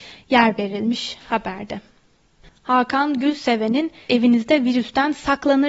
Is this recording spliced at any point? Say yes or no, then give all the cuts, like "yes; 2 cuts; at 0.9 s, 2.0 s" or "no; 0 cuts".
yes; 1 cut; at 4.1 s